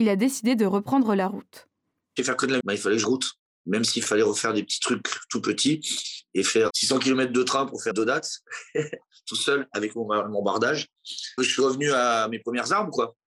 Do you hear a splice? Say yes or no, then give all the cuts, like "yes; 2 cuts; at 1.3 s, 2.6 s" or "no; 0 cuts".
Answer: yes; 5 cuts; at 2.6 s, 3.0 s, 6.7 s, 7.9 s, 11.4 s